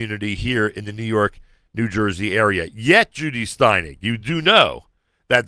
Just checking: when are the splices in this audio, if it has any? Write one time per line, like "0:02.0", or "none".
none